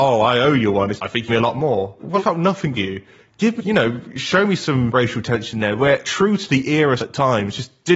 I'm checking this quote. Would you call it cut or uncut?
cut